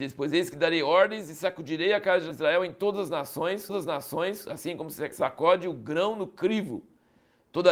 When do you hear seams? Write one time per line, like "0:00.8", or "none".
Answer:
0:03.7